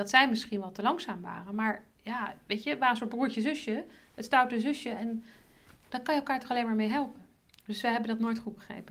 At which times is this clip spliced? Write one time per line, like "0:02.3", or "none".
none